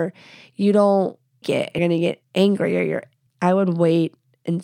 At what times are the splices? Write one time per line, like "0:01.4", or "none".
0:01.4
0:01.8
0:03.3